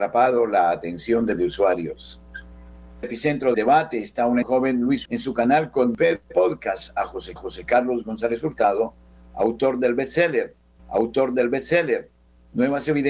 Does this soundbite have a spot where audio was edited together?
yes; 8 cuts; at 1.4 s, 3.0 s, 3.5 s, 4.4 s, 5.1 s, 6.2 s, 7.4 s, 10.8 s

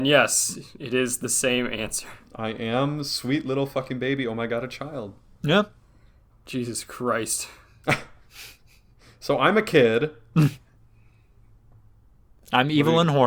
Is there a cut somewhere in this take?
no; 0 cuts

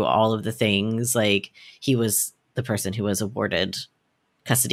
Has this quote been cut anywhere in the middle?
no; 0 cuts

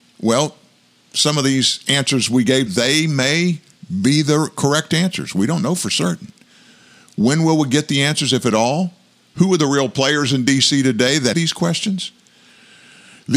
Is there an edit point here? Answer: yes; 2 cuts; at 2.7 s, 11.3 s

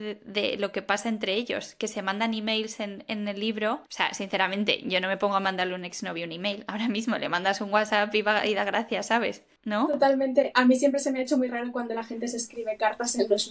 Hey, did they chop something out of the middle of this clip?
yes; 1 cut; at 3.9 s

